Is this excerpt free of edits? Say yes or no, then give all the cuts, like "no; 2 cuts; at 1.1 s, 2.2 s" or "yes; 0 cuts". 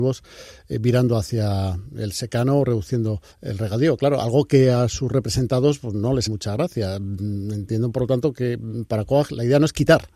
no; 2 cuts; at 3.3 s, 6.3 s